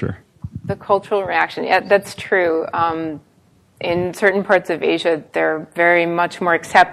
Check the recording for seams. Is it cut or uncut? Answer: uncut